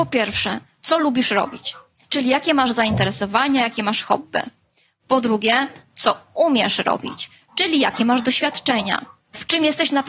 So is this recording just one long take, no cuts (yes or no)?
yes